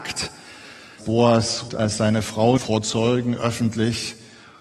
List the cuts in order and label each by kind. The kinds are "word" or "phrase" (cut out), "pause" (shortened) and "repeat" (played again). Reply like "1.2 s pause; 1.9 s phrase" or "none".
1.0 s word; 1.7 s word; 2.6 s word